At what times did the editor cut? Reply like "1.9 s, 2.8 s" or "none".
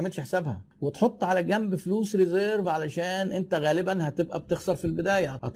none